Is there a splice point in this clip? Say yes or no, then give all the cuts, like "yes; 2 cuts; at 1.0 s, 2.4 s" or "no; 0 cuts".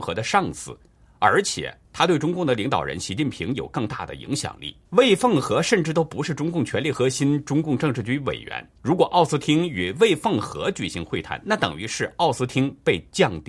yes; 3 cuts; at 1.8 s, 4.8 s, 8.8 s